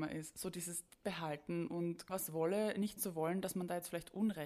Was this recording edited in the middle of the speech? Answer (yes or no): yes